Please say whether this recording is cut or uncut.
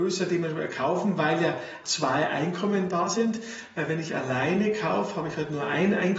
cut